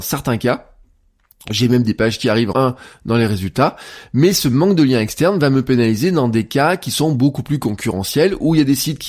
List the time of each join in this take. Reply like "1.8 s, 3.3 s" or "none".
2.5 s